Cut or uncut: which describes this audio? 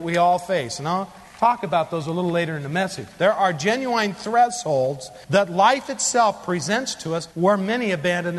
cut